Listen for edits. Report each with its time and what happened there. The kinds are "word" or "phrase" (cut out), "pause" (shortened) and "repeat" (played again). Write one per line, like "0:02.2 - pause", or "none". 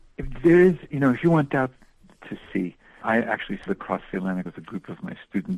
0:03.0 - word
0:03.7 - word
0:04.5 - word